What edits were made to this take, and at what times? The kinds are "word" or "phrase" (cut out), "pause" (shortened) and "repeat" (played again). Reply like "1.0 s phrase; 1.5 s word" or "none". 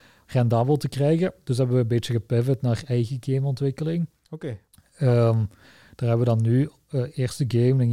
none